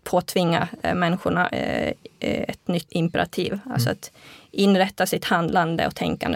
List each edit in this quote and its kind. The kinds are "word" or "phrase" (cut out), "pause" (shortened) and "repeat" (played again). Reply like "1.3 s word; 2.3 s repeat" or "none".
2.9 s word